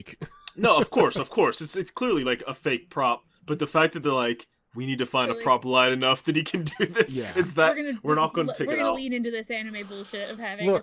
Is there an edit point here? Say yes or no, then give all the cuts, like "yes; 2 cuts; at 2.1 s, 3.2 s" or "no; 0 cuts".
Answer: no; 0 cuts